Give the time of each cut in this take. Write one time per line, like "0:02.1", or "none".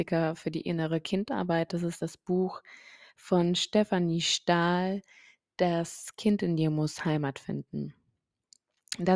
none